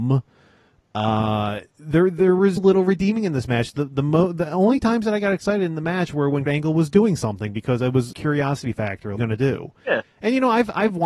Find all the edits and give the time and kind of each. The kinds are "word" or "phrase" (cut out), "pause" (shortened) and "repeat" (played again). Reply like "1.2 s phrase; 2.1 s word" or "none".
2.6 s word; 6.5 s word; 8.1 s phrase; 9.2 s phrase